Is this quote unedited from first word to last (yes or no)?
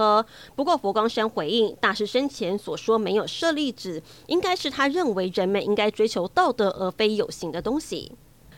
yes